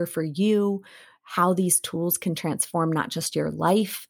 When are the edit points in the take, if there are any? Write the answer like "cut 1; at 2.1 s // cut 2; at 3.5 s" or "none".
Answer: none